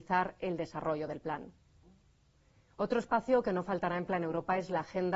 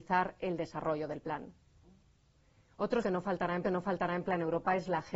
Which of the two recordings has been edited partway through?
second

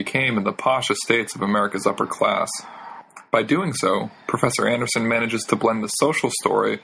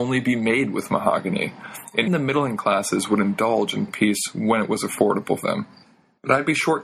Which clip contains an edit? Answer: second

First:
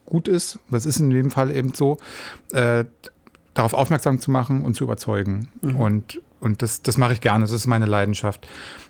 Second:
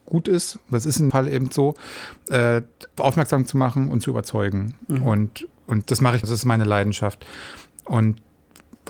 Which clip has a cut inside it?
second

